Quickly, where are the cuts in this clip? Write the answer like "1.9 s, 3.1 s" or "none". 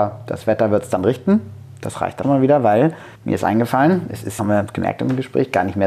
2.2 s, 3.1 s, 4.4 s